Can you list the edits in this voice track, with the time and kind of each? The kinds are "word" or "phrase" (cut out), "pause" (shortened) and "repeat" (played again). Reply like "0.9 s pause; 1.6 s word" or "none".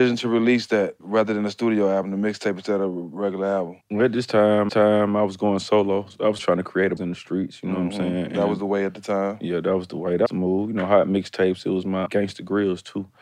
3.8 s pause; 4.7 s repeat; 6.4 s word; 7.0 s word; 10.3 s word; 12.1 s word